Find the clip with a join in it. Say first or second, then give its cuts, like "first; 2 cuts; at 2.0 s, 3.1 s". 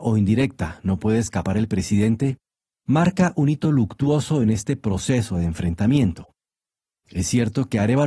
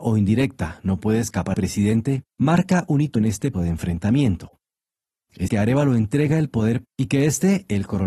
second; 6 cuts; at 1.5 s, 2.3 s, 3.2 s, 3.5 s, 5.5 s, 6.8 s